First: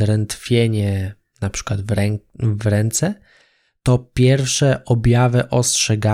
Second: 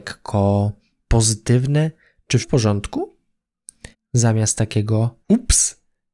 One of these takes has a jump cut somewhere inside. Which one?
second; 3 cuts; at 2.4 s, 3.9 s, 5.2 s

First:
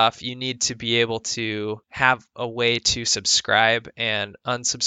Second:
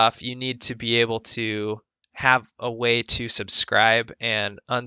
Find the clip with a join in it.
first; 1 cut; at 1.8 s

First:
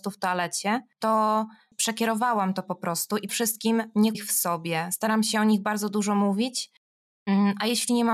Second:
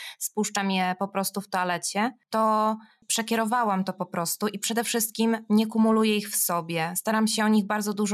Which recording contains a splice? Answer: first; 2 cuts; at 3.3 s, 4.1 s

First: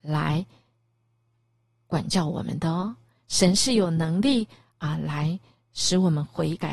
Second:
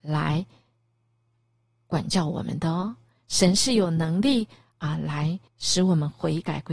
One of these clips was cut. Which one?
second; 1 cut; at 5.5 s

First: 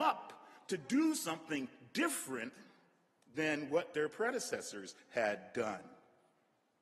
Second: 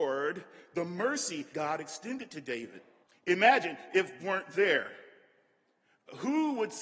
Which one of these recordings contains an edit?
second; 3 cuts; at 1.5 s, 3.0 s, 4.2 s

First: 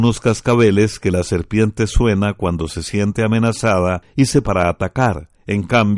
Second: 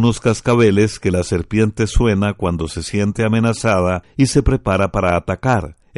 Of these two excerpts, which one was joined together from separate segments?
first; 1 cut; at 4.4 s

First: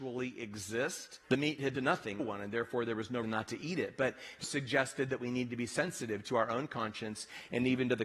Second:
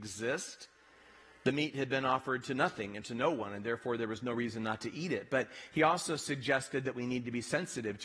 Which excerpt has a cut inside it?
first; 5 cuts; at 1.2 s, 1.7 s, 2.2 s, 3.2 s, 4.4 s

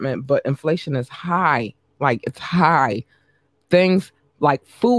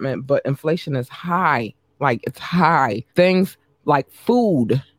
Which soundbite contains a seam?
second; 1 cut; at 3.1 s

